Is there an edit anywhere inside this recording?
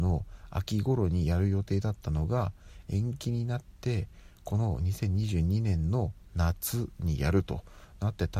no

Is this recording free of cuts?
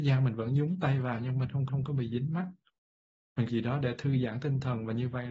no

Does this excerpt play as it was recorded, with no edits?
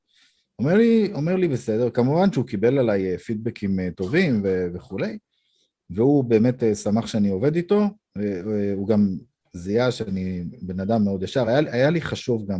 yes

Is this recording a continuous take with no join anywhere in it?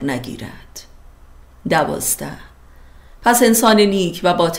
yes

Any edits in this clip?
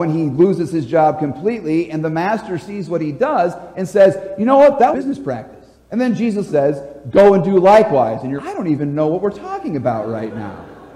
yes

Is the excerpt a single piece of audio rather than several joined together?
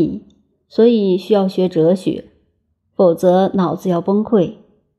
yes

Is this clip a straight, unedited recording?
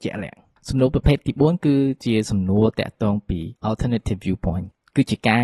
no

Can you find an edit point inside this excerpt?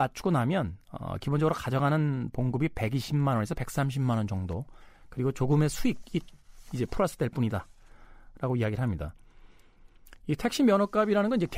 no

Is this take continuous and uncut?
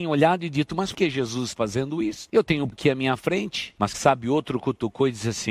no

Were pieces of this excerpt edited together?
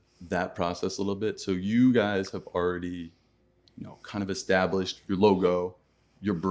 yes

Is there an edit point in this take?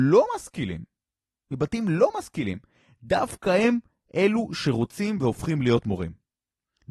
no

